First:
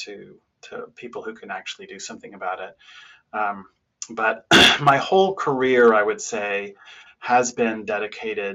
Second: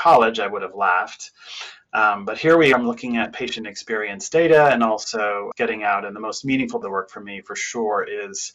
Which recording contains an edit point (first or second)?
second